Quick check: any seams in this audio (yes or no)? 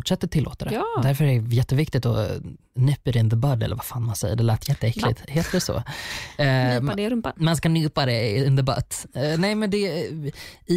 no